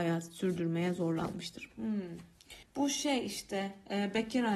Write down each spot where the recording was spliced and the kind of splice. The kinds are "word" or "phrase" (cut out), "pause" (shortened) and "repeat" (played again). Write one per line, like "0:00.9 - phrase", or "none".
0:02.6 - pause